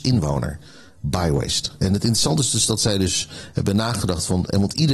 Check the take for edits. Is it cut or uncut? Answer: uncut